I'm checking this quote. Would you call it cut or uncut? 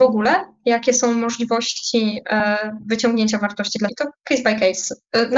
cut